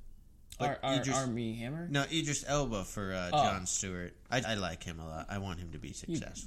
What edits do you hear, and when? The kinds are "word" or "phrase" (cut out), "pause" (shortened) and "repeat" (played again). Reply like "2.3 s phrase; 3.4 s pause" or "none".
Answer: 4.4 s word